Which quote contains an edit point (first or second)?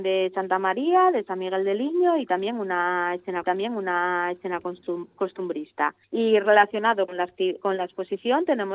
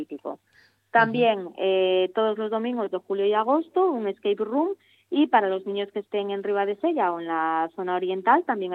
first